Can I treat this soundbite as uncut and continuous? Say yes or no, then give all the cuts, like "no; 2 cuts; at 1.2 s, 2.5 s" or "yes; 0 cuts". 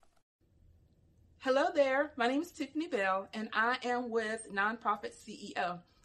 yes; 0 cuts